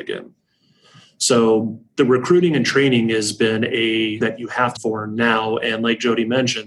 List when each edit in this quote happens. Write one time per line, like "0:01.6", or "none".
0:04.2
0:04.8

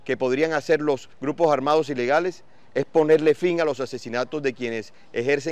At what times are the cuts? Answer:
0:01.1

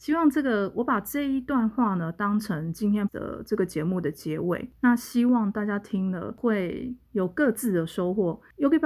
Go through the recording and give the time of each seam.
0:03.1

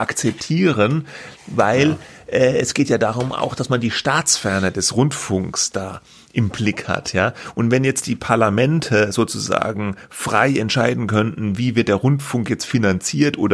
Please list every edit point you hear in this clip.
none

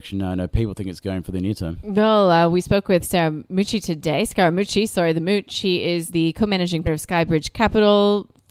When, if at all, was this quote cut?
0:03.0
0:06.1
0:06.8

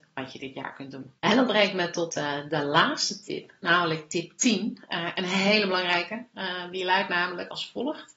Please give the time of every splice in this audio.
0:01.2

